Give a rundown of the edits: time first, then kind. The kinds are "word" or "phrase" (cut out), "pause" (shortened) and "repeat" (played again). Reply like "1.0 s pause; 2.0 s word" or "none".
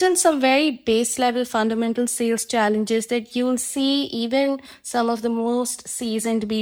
none